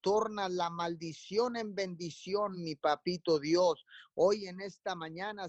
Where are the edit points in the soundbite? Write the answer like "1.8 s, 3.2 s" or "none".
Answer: none